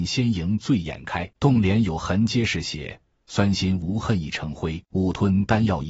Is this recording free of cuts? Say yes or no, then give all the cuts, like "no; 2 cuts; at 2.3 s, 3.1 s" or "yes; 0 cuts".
no; 2 cuts; at 1.3 s, 4.8 s